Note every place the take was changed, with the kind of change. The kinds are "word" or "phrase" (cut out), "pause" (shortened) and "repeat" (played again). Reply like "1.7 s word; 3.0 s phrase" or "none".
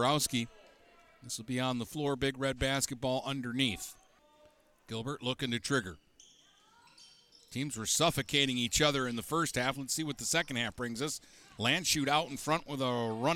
4.2 s pause